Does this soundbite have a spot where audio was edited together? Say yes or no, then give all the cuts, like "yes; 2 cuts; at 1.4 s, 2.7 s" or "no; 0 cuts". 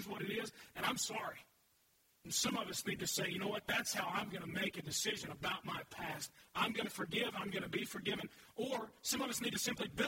no; 0 cuts